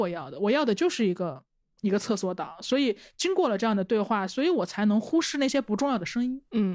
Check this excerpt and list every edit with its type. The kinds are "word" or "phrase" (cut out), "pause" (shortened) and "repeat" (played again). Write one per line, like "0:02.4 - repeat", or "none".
0:01.6 - pause